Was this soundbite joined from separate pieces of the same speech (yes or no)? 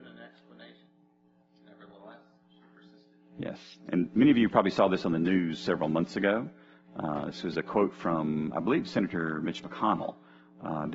no